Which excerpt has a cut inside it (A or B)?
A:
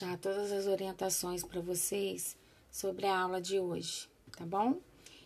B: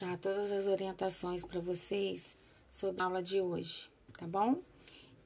B